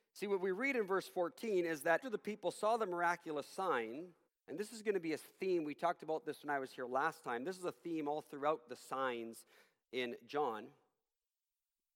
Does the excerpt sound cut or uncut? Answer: cut